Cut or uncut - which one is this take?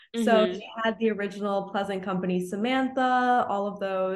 uncut